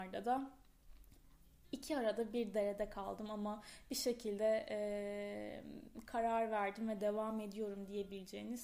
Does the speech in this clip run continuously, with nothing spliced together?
yes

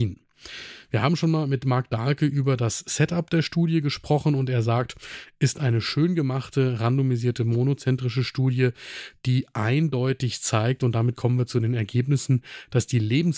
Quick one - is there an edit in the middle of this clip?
no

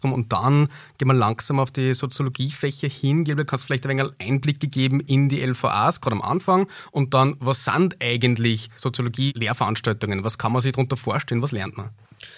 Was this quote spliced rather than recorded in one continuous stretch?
no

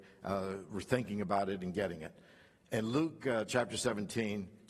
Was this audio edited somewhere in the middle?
no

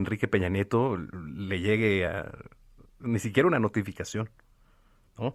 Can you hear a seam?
no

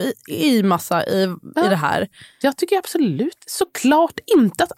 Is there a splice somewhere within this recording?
no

